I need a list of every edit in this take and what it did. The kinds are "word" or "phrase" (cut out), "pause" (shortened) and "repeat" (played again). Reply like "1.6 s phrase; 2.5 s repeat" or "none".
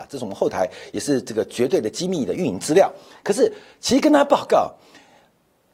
none